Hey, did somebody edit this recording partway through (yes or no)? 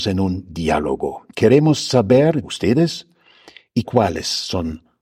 yes